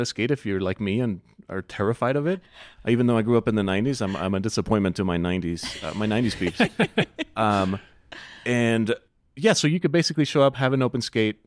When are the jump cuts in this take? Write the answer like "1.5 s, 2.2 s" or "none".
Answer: none